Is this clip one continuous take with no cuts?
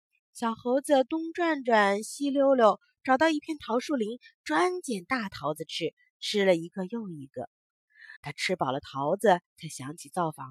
no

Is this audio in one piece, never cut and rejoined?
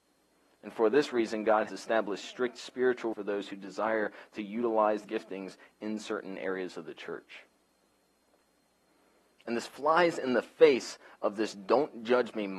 no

